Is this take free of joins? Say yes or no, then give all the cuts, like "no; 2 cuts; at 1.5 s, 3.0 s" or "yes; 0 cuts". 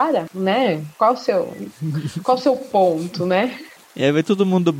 yes; 0 cuts